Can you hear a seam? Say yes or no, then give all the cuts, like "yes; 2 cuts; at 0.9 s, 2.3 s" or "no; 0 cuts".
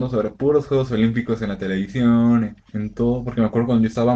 yes; 1 cut; at 2.6 s